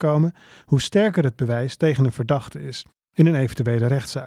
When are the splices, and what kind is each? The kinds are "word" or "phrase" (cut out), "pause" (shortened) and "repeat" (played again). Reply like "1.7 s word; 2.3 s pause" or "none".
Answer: none